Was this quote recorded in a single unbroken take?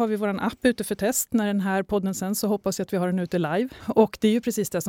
yes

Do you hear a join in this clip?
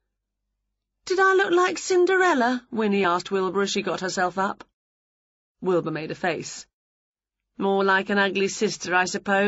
no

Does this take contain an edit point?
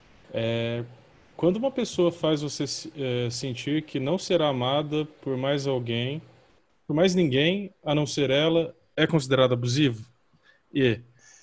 no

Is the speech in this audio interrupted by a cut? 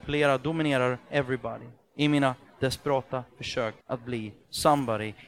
yes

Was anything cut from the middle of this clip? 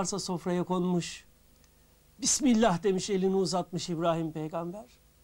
no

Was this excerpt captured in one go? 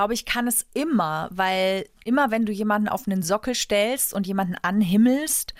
yes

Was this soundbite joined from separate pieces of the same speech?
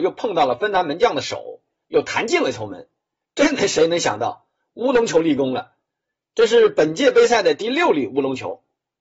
no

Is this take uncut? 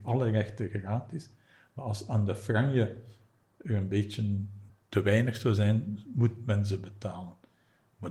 yes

